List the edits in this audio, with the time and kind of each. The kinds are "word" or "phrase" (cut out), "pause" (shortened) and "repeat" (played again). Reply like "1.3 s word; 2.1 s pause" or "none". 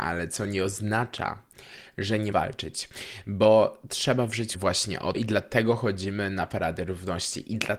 2.3 s word; 4.5 s phrase; 5.1 s word